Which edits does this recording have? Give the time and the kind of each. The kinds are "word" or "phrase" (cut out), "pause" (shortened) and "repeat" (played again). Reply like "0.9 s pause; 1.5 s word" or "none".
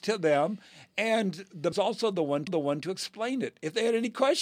1.7 s phrase; 2.5 s repeat